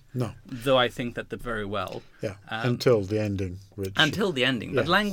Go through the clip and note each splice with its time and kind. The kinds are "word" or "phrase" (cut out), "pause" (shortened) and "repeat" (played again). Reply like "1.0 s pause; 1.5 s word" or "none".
1.4 s phrase; 2.1 s pause